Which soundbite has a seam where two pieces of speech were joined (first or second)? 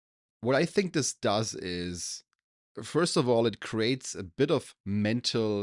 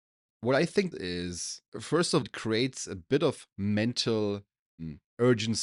second